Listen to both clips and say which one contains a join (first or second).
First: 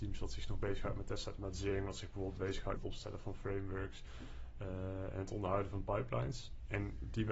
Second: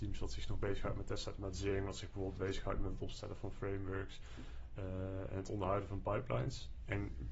first